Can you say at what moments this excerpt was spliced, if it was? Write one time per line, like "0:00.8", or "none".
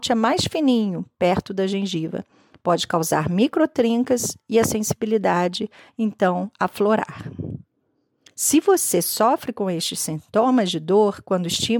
none

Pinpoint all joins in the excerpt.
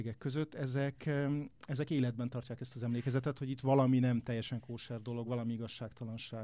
none

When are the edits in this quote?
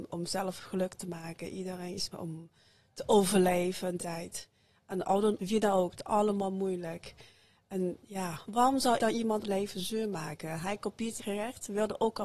0:02.1
0:04.0
0:05.4
0:05.9
0:08.4
0:09.0
0:09.4
0:11.2

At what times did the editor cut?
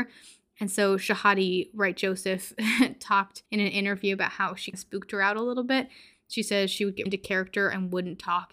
0:03.5
0:04.7
0:07.1

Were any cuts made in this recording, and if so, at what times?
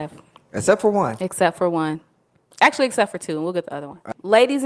none

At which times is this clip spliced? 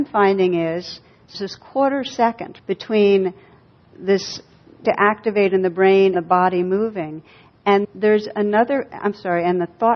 0:01.3
0:02.6
0:04.8
0:06.1
0:07.8

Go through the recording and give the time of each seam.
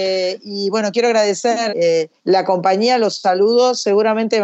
0:01.7
0:02.2

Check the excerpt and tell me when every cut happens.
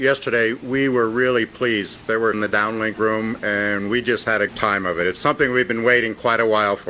0:02.3
0:04.5

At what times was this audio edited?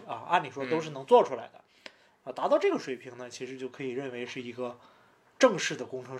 none

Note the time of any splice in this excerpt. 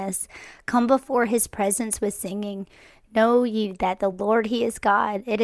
none

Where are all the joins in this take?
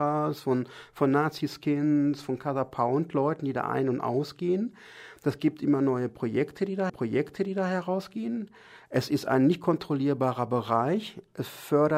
0:06.9

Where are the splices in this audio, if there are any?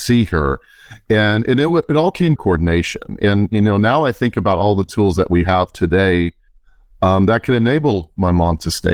0:02.4

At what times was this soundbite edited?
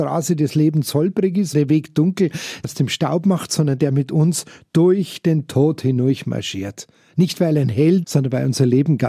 0:01.5
0:08.0

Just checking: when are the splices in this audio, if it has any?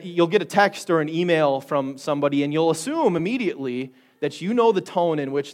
none

